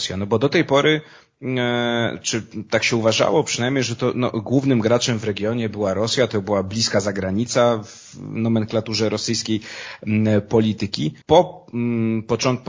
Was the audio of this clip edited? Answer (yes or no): yes